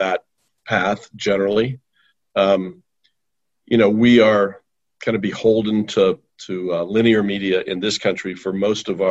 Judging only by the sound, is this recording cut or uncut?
uncut